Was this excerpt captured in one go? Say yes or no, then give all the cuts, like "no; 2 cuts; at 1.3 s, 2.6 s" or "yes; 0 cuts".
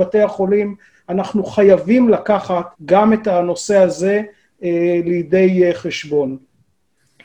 no; 1 cut; at 2.7 s